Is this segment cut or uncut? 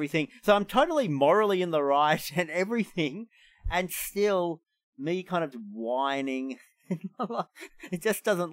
cut